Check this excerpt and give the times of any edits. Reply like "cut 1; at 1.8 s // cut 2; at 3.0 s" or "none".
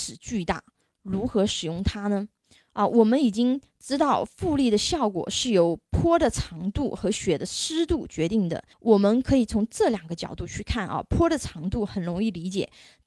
cut 1; at 8.7 s